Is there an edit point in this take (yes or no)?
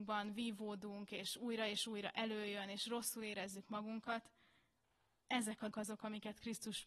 yes